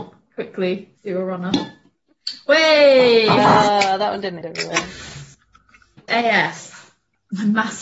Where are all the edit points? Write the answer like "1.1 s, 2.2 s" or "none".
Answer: 1.0 s, 4.4 s, 6.1 s